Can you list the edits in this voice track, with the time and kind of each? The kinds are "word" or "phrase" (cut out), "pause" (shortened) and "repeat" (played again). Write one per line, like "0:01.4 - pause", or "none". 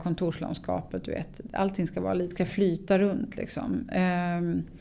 0:02.3 - phrase